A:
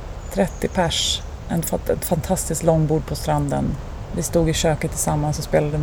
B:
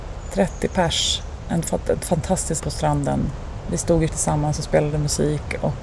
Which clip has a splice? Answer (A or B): B